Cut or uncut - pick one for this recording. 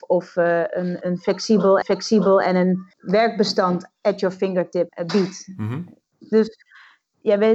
cut